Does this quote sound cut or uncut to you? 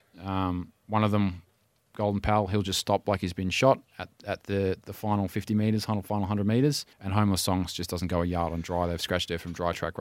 cut